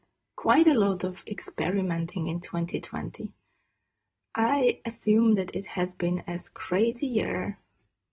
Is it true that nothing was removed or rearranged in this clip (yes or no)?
yes